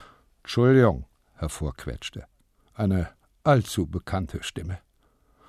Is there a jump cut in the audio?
no; 0 cuts

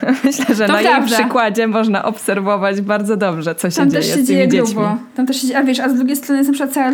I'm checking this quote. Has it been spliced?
no; 0 cuts

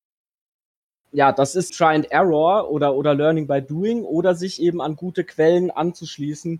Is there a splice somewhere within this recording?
yes; 1 cut; at 1.7 s

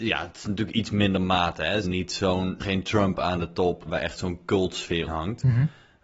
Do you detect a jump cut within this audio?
yes; 4 cuts; at 1.8 s, 2.6 s, 3.8 s, 5.1 s

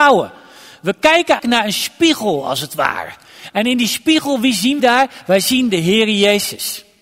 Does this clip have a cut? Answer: yes; 3 cuts; at 1.4 s, 4.8 s, 5.7 s

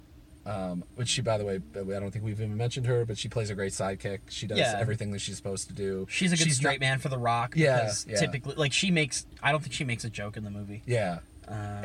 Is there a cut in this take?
no; 0 cuts

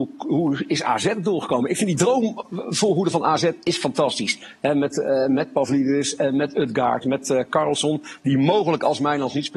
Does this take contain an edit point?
no; 0 cuts

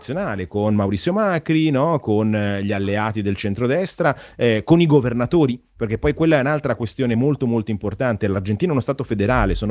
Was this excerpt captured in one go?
yes; 0 cuts

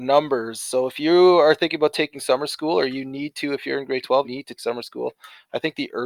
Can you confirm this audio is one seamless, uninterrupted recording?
no; 2 cuts; at 4.2 s, 4.6 s

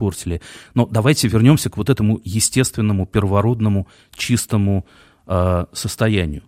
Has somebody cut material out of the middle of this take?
no; 0 cuts

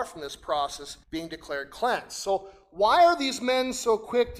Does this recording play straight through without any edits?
no; 1 cut; at 1.0 s

